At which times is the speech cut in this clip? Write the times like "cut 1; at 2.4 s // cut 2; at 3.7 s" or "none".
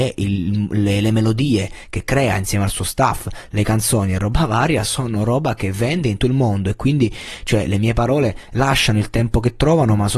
cut 1; at 6.2 s